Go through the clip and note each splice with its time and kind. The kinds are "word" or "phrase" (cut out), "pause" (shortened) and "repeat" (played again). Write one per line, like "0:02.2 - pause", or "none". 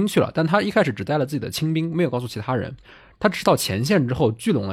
none